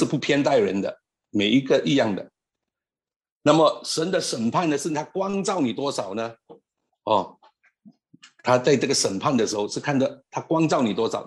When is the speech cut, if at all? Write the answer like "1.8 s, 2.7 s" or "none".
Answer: none

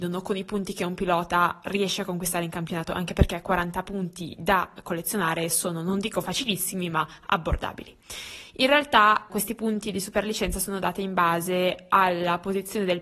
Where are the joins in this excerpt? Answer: 9.3 s

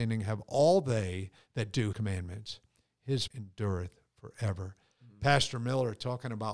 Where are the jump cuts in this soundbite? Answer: 1.9 s, 3.3 s

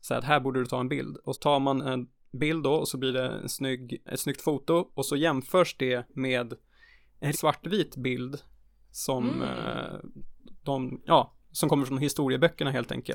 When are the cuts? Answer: 1.3 s, 4.1 s, 7.3 s

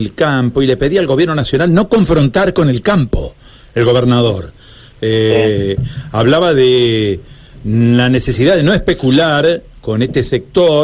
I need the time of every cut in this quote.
none

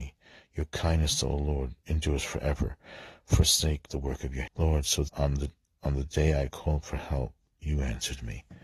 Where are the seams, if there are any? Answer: 3.9 s, 4.5 s, 5.1 s

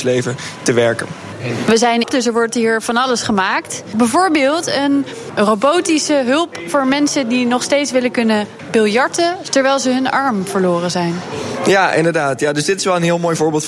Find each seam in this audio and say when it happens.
2.0 s

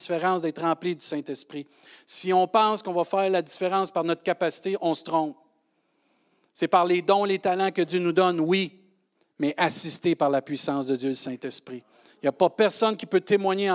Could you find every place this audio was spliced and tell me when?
none

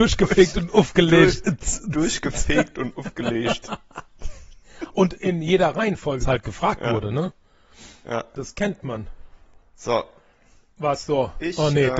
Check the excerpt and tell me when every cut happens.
6.2 s, 9.7 s

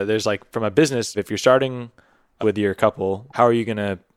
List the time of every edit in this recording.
1.1 s, 2.4 s, 3.3 s

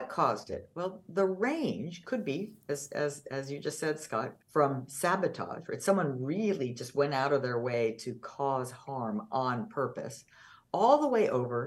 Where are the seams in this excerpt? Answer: 4.4 s

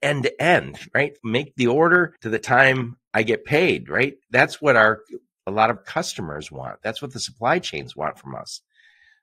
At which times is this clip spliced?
1.2 s, 2.2 s, 4.2 s, 5.8 s

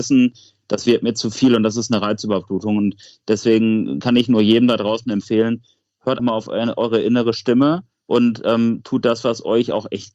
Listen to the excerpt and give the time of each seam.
6.2 s

